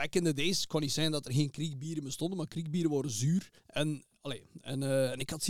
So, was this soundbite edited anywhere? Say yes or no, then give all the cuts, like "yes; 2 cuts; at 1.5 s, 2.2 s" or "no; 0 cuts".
yes; 1 cut; at 3.6 s